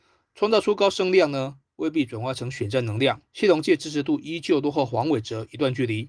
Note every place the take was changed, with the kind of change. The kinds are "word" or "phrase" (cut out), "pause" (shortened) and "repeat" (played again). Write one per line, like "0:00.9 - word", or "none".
0:03.3 - pause